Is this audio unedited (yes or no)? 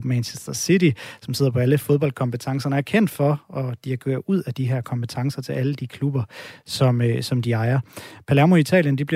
yes